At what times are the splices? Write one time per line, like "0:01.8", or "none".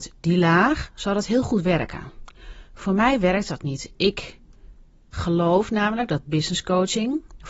0:05.1